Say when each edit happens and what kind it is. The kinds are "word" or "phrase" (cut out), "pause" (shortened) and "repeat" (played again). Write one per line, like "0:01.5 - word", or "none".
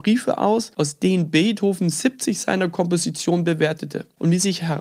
none